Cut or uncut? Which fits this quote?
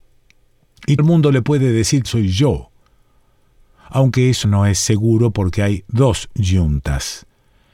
cut